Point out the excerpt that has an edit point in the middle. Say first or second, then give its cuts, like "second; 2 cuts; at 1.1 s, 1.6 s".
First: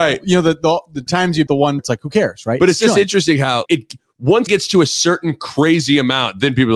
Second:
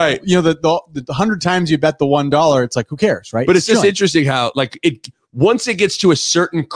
first; 5 cuts; at 1.1 s, 1.5 s, 1.8 s, 3.7 s, 4.5 s